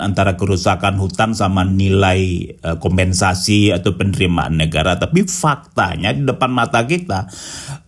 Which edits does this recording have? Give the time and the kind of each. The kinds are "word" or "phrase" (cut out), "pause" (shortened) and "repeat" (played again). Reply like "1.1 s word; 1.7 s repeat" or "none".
none